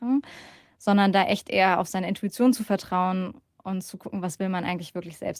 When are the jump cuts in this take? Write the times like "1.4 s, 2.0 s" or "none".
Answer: none